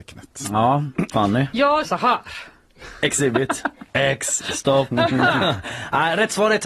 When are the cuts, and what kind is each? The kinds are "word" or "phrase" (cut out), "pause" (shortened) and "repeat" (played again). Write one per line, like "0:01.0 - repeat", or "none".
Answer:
0:01.1 - word
0:01.8 - phrase
0:03.9 - pause